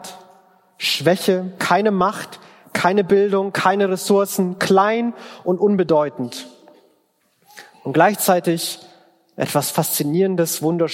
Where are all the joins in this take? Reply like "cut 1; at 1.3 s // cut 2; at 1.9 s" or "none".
none